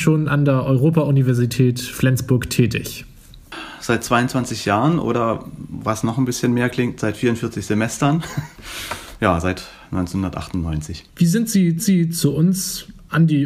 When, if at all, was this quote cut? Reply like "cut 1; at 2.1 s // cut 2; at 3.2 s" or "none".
cut 1; at 11.1 s // cut 2; at 11.8 s